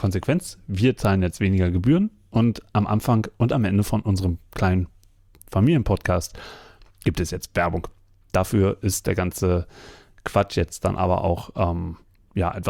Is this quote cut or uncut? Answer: uncut